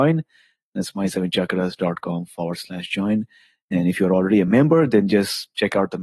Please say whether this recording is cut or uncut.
uncut